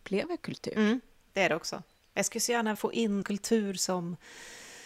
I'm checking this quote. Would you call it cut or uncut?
cut